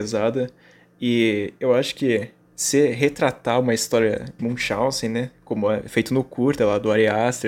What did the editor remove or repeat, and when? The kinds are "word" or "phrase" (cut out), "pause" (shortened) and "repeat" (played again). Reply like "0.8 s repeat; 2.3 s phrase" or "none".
4.4 s word